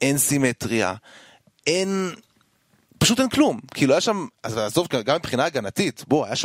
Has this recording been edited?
no; 0 cuts

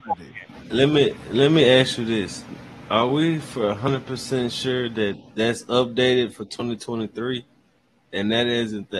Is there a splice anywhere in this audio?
no; 0 cuts

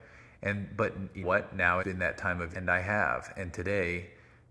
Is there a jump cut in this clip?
yes; 3 cuts; at 1.2 s, 1.8 s, 2.5 s

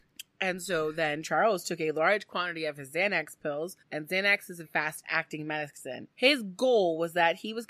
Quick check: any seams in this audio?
yes; 3 cuts; at 3.8 s, 4.6 s, 6.1 s

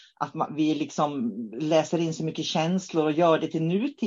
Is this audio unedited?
yes; 0 cuts

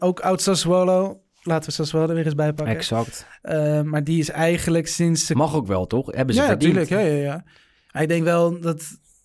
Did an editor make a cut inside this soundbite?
no; 0 cuts

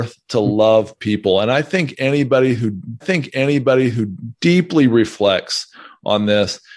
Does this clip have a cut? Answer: yes; 1 cut; at 3.0 s

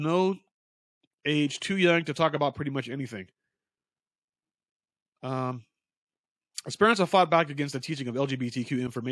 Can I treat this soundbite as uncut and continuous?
yes; 0 cuts

